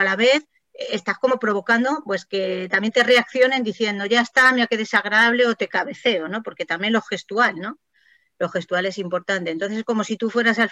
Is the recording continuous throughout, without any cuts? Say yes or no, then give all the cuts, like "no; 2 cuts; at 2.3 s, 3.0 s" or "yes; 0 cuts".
yes; 0 cuts